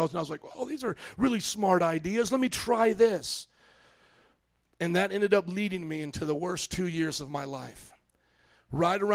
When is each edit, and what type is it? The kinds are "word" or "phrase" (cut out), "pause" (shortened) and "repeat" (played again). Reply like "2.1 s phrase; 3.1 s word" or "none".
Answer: none